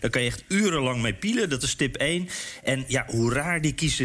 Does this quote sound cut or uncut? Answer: uncut